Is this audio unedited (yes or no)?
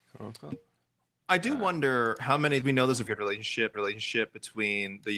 no